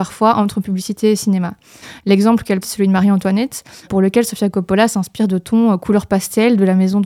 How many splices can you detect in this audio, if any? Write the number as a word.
two